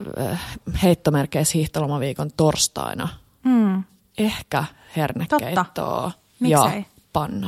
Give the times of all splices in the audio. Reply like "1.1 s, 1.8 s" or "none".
none